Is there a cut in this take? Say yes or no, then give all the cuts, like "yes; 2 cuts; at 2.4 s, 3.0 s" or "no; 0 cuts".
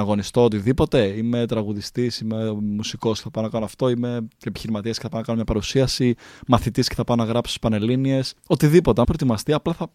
yes; 2 cuts; at 8.4 s, 9.0 s